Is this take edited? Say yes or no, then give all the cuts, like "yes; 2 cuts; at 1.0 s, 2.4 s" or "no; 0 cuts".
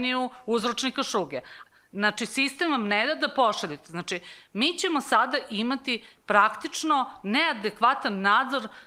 no; 0 cuts